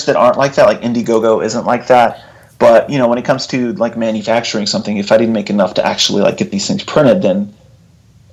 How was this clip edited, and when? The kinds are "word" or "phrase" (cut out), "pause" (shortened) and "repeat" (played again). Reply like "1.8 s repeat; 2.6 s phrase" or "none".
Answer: none